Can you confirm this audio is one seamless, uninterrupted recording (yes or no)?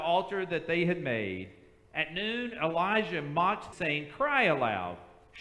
no